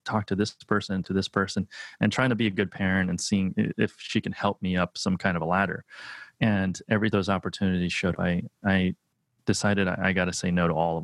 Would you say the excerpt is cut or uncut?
cut